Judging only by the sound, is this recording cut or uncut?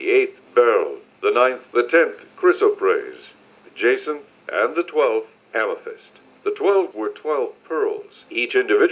cut